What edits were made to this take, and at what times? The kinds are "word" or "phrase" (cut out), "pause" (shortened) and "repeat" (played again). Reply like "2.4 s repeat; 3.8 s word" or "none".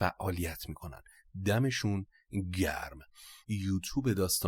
3.4 s word